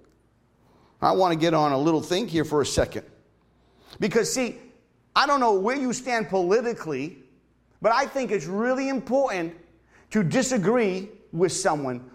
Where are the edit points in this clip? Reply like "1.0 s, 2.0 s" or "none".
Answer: none